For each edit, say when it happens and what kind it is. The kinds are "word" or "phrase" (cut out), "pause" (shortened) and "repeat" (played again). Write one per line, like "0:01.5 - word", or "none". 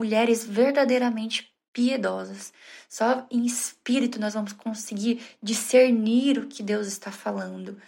none